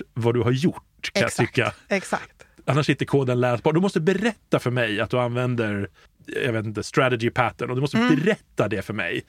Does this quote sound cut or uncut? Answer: cut